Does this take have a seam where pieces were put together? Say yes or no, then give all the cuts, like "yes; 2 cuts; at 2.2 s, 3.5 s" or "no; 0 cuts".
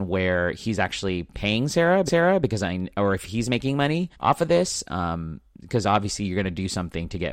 yes; 2 cuts; at 2.1 s, 4.1 s